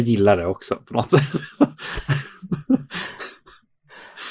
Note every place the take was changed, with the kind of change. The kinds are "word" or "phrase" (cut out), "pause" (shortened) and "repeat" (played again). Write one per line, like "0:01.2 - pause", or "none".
none